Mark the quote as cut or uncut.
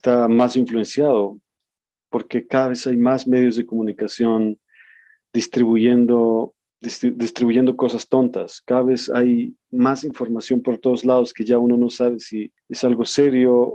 uncut